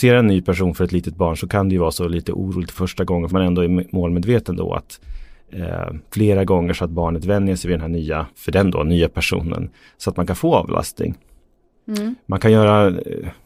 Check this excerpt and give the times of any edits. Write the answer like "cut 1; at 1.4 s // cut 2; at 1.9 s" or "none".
cut 1; at 2.7 s // cut 2; at 3.3 s // cut 3; at 8.3 s